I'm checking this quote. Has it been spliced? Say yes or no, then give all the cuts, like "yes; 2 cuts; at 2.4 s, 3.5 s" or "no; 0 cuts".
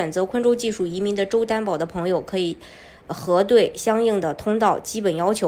no; 0 cuts